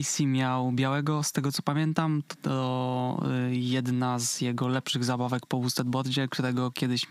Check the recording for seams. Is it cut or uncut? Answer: uncut